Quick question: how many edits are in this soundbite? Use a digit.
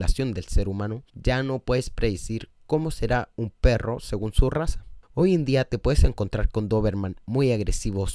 2